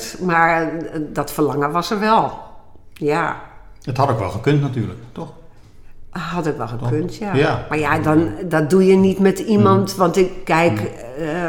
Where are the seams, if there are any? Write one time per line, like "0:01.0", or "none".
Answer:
none